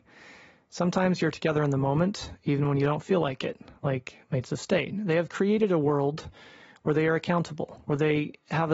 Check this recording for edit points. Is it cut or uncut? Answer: uncut